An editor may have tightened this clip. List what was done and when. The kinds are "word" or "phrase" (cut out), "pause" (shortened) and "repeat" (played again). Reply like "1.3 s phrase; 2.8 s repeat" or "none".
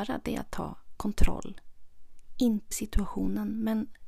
2.7 s word